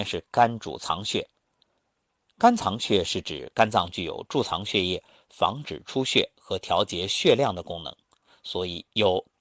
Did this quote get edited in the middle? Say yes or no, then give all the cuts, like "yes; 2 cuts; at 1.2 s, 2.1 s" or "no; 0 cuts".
no; 0 cuts